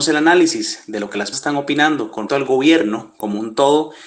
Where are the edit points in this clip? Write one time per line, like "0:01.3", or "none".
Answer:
0:01.3
0:02.3